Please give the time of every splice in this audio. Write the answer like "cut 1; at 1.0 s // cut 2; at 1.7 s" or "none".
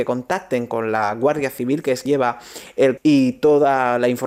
cut 1; at 2.1 s // cut 2; at 3.0 s